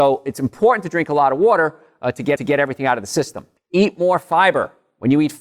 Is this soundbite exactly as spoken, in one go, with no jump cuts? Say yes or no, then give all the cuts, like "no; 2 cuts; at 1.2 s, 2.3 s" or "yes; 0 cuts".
no; 2 cuts; at 2.4 s, 3.6 s